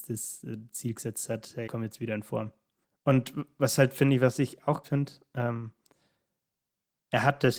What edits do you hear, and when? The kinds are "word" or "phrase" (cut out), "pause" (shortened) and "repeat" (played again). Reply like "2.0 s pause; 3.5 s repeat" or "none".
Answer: 1.7 s word; 2.8 s pause; 4.8 s word